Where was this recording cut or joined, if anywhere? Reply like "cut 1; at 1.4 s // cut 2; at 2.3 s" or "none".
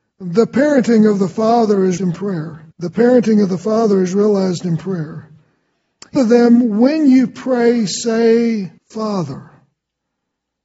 cut 1; at 2.0 s // cut 2; at 2.7 s // cut 3; at 6.2 s // cut 4; at 8.8 s